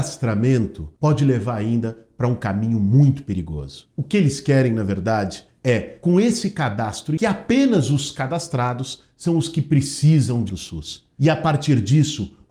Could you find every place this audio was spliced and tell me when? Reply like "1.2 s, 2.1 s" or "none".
1.0 s, 7.2 s, 10.5 s